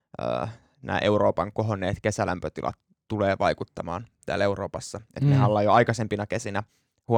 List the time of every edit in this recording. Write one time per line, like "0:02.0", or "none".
none